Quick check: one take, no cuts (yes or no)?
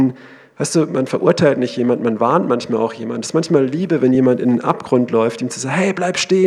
yes